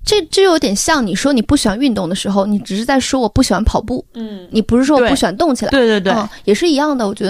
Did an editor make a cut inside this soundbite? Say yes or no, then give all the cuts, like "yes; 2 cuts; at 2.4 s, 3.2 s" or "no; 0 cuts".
yes; 1 cut; at 4.1 s